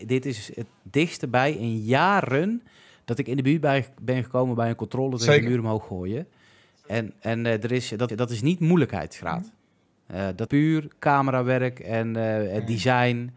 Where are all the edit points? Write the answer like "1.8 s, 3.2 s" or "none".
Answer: 8.1 s, 10.5 s